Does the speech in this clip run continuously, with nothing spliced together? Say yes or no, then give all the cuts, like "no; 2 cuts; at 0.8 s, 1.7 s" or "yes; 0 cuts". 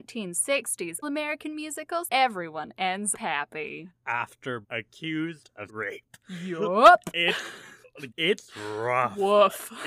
no; 6 cuts; at 1.0 s, 2.1 s, 3.1 s, 4.6 s, 5.7 s, 8.1 s